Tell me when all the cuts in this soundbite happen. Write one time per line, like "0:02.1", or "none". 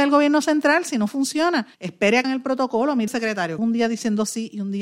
0:01.7
0:02.2
0:03.1
0:03.6